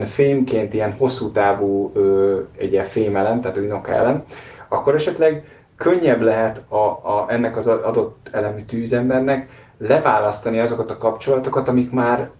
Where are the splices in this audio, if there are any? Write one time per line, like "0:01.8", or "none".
none